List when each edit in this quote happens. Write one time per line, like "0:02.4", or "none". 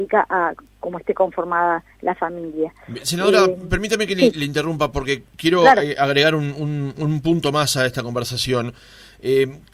0:01.9